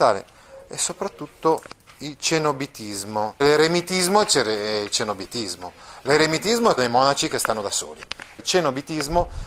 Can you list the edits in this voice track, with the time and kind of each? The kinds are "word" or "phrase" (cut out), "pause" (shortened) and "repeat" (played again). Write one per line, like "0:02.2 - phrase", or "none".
0:03.4 - word
0:06.8 - word
0:08.4 - word